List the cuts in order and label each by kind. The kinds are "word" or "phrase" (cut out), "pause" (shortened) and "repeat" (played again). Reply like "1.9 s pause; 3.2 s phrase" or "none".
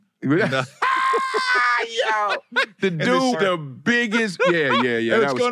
3.3 s word